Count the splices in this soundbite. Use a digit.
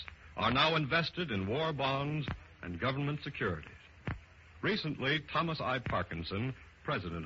0